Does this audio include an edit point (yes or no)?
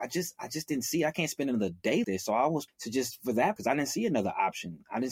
yes